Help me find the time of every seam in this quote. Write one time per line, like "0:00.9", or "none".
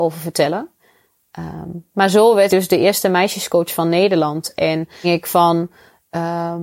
0:02.5
0:05.0